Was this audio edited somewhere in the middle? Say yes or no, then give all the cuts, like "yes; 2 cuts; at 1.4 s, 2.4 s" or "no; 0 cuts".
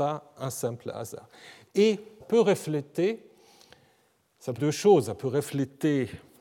yes; 2 cuts; at 2.2 s, 4.6 s